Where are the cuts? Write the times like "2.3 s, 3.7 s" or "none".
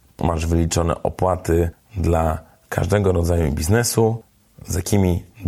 none